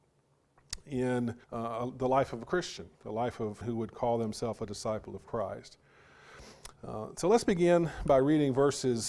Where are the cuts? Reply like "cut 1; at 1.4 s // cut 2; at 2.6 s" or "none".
cut 1; at 1.4 s // cut 2; at 2.9 s // cut 3; at 3.6 s // cut 4; at 6.8 s